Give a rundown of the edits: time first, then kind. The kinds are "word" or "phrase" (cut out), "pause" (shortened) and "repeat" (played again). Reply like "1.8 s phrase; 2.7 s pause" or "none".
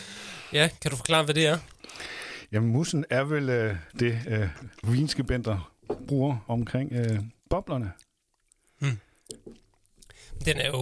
3.9 s pause; 7.4 s pause